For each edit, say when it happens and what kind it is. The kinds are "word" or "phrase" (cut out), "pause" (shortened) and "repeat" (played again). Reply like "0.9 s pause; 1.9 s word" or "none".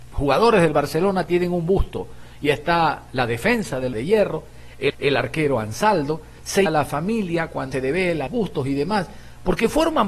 3.9 s phrase; 4.9 s repeat; 6.7 s word; 7.7 s word; 8.3 s word